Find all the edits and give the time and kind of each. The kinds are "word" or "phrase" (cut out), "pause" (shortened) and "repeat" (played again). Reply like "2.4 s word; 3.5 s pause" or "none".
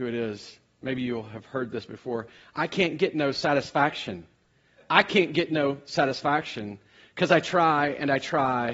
none